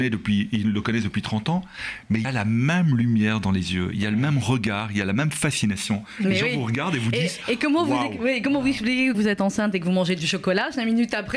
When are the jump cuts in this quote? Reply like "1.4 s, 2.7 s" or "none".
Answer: 2.2 s, 9.1 s